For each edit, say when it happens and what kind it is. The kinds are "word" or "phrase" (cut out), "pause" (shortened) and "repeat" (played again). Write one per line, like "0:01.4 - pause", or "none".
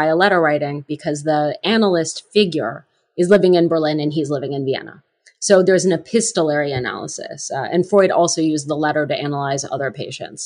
none